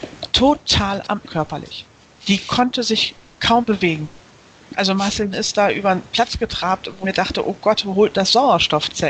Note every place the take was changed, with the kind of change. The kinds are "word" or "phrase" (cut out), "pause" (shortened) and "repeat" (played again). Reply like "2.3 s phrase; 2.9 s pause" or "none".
1.2 s word; 3.6 s word; 5.3 s word; 7.0 s word